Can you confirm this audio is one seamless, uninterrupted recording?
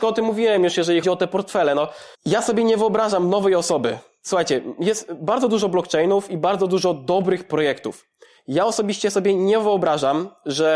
no; 2 cuts; at 1.0 s, 2.1 s

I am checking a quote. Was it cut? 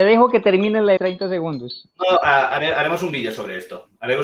yes; 1 cut; at 1.0 s

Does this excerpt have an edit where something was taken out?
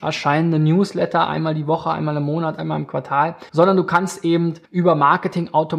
yes; 2 cuts; at 3.5 s, 4.7 s

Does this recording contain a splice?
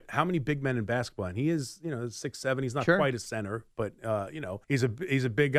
yes; 1 cut; at 4.6 s

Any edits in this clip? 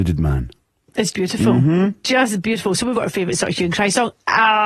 yes; 2 cuts; at 1.1 s, 2.9 s

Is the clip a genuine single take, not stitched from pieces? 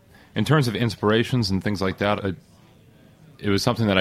no; 1 cut; at 2.2 s

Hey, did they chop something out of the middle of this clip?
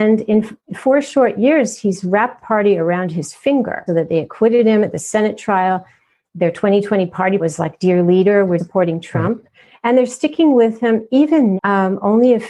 yes; 5 cuts; at 2.4 s, 3.9 s, 7.4 s, 8.6 s, 11.6 s

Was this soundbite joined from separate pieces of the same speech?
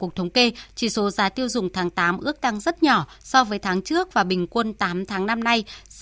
no; 0 cuts

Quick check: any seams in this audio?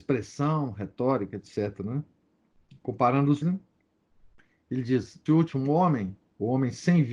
yes; 2 cuts; at 3.4 s, 5.3 s

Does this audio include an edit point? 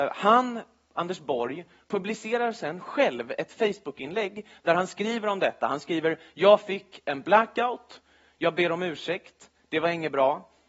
no; 0 cuts

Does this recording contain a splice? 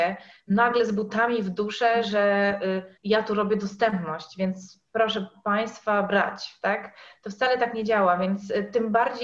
yes; 1 cut; at 3.0 s

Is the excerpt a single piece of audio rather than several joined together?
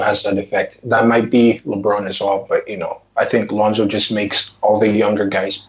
yes; 0 cuts

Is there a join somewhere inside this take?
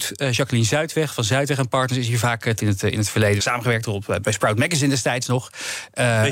yes; 3 cuts; at 2.6 s, 3.4 s, 4.2 s

